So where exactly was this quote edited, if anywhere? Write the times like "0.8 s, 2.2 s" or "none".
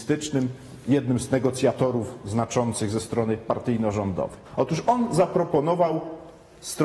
4.5 s